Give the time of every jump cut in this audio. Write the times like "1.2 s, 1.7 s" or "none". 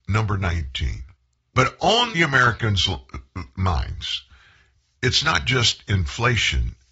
1.2 s, 2.1 s